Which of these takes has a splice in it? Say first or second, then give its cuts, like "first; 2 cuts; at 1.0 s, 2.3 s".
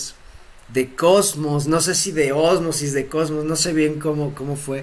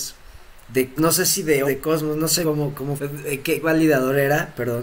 second; 5 cuts; at 1.0 s, 1.6 s, 2.4 s, 3.0 s, 3.6 s